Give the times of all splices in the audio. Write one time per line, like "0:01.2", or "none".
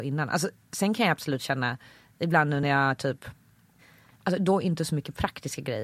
none